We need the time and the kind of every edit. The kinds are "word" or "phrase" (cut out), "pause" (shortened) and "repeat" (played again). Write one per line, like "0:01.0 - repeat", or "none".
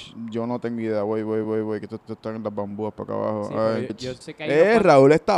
0:01.4 - repeat
0:02.1 - repeat
0:03.9 - word
0:04.2 - word